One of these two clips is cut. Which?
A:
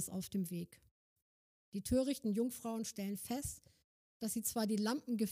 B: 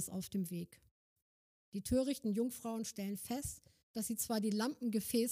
B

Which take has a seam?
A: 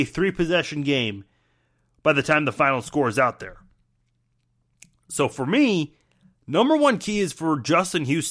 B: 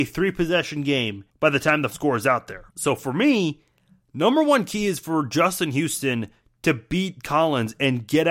B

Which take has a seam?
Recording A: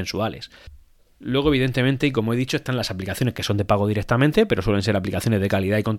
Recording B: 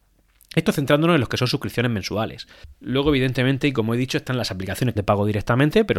B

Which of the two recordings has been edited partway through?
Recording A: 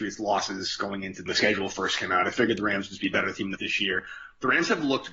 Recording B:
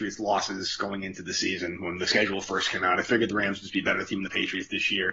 A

